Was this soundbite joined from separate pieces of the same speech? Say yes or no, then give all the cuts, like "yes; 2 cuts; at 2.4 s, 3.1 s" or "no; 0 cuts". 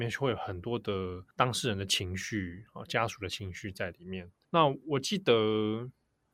yes; 2 cuts; at 1.3 s, 4.4 s